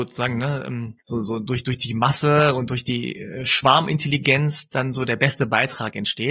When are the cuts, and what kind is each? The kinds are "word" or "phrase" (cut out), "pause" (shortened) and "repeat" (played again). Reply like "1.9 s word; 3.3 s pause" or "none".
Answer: 1.0 s pause